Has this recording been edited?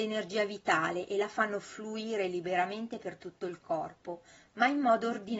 no; 0 cuts

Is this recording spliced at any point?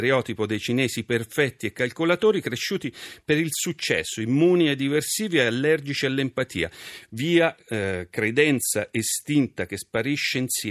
no; 0 cuts

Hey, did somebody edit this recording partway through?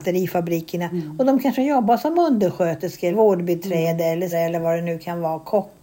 yes; 2 cuts; at 3.1 s, 4.3 s

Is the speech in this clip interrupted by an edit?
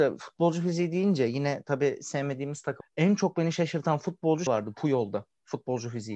yes; 2 cuts; at 2.8 s, 4.5 s

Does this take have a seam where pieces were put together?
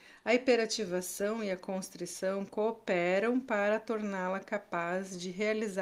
no; 0 cuts

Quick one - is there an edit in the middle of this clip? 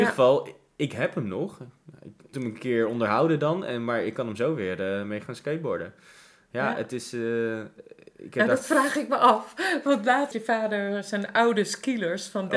yes; 2 cuts; at 2.3 s, 10.3 s

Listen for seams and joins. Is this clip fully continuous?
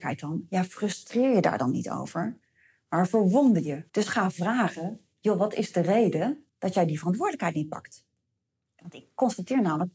no; 2 cuts; at 3.9 s, 6.5 s

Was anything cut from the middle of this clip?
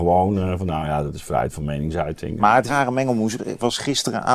yes; 2 cuts; at 2.7 s, 3.4 s

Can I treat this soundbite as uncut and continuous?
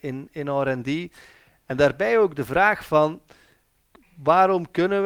yes; 0 cuts

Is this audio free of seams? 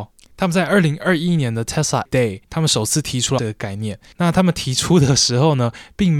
no; 2 cuts; at 2.1 s, 3.4 s

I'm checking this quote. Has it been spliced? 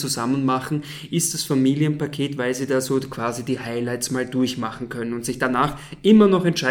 no; 0 cuts

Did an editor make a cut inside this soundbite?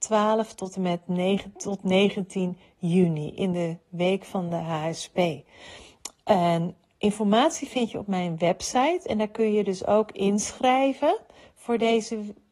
no; 0 cuts

